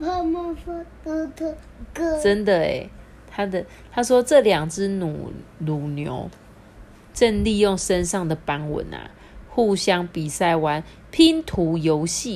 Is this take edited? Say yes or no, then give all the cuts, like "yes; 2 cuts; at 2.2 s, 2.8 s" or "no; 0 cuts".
no; 0 cuts